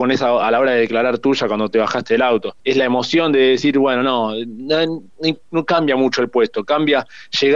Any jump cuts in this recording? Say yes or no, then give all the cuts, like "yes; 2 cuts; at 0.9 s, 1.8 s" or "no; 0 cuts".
yes; 1 cut; at 2.6 s